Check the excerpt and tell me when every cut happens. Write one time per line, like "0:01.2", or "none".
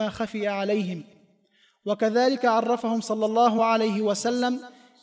none